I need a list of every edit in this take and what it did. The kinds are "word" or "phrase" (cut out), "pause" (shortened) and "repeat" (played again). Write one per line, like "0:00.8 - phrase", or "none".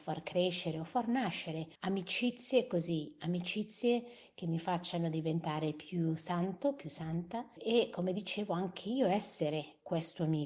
0:01.8 - pause
0:07.6 - word